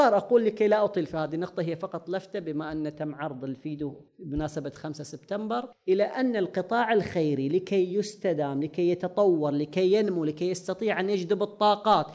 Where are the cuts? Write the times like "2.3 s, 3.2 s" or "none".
4.1 s, 5.7 s